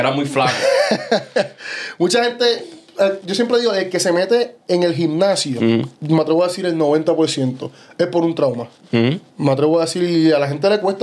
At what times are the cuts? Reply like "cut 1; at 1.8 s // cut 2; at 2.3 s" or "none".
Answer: cut 1; at 5.9 s